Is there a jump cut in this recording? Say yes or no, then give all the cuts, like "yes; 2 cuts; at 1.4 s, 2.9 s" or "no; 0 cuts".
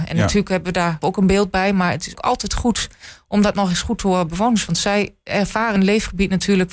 yes; 4 cuts; at 1.0 s, 2.1 s, 4.3 s, 5.8 s